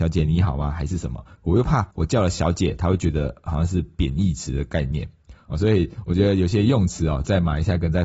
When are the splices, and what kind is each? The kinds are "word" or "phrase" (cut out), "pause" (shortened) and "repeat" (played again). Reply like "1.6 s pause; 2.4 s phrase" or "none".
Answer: 1.9 s pause